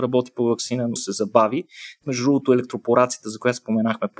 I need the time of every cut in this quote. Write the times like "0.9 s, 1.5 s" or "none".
1.0 s, 2.0 s